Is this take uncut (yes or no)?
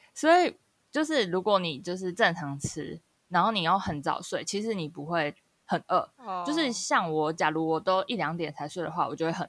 yes